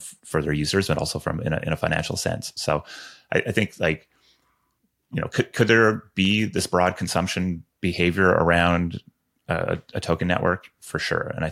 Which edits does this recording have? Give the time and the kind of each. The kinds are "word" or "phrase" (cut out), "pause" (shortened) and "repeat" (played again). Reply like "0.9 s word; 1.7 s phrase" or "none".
none